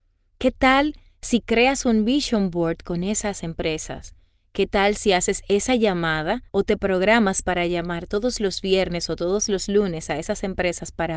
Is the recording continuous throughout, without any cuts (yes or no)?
no